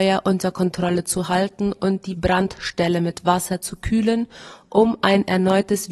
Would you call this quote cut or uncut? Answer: uncut